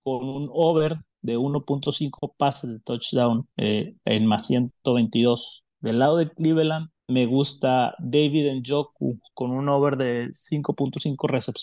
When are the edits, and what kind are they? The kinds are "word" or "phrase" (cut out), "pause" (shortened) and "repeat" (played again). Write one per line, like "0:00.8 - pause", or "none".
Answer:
0:03.5 - pause
0:07.0 - pause